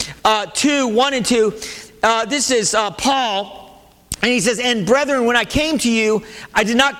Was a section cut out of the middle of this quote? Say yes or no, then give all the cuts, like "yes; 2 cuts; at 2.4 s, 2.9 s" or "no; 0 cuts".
no; 0 cuts